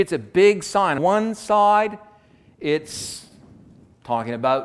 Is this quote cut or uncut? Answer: cut